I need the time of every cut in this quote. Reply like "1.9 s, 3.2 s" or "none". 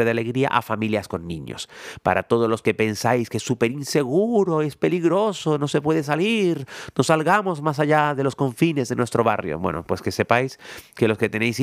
none